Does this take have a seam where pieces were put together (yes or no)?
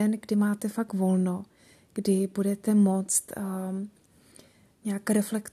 no